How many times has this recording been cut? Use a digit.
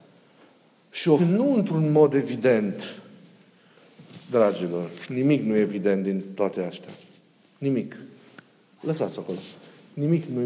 1